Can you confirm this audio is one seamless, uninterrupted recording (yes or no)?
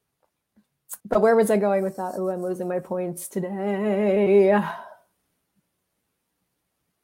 no